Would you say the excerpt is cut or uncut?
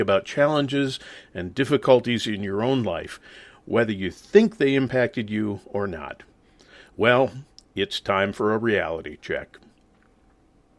uncut